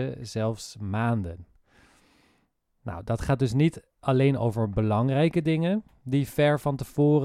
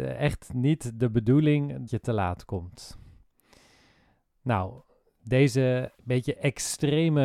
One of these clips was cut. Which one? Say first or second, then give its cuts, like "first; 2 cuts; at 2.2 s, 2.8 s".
second; 2 cuts; at 1.9 s, 6.0 s